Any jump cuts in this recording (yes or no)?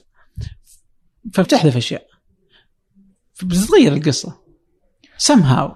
yes